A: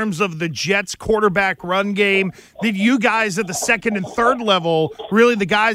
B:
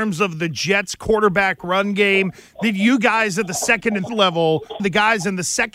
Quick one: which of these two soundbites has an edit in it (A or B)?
B